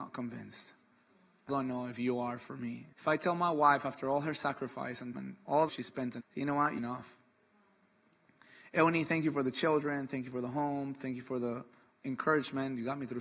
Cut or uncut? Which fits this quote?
cut